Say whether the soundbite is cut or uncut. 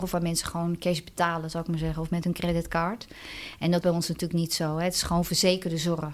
cut